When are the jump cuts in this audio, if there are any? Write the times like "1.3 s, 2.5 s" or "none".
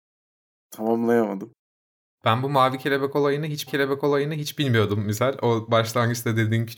1.8 s, 3.7 s